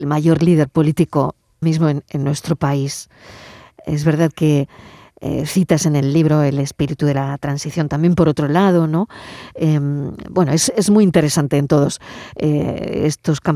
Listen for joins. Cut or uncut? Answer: cut